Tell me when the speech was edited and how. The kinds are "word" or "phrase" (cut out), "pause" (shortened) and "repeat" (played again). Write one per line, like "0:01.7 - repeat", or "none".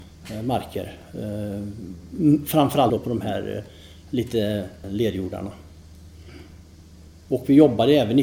0:02.9 - word
0:04.8 - word

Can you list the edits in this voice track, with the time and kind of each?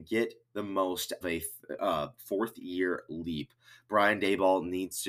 0:01.2 - phrase

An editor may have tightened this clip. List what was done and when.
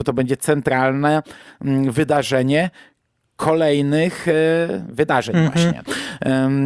none

